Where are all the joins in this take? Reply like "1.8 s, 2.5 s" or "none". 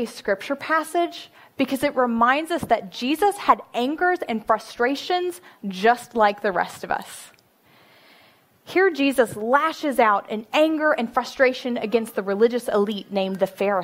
none